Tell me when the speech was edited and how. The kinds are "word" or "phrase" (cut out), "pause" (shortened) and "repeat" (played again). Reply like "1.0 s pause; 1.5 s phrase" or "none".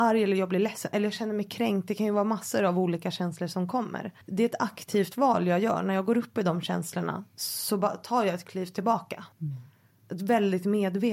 4.2 s pause; 9.3 s pause